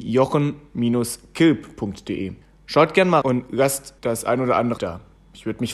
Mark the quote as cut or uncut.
cut